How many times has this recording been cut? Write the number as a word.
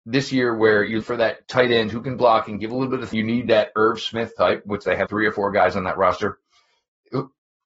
four